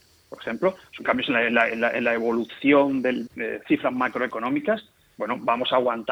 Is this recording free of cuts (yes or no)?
no